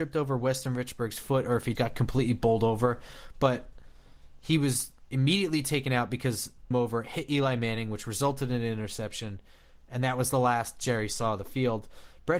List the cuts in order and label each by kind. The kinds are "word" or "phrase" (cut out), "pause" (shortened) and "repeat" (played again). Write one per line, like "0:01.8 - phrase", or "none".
0:01.7 - word
0:06.7 - phrase